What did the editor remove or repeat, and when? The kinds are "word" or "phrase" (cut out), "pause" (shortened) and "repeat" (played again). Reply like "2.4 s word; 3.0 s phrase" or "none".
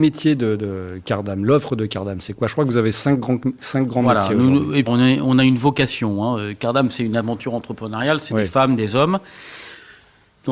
4.9 s word